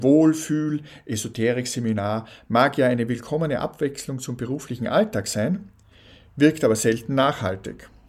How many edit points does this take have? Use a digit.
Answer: 0